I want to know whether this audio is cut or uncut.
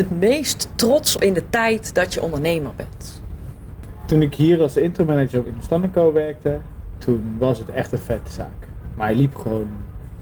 cut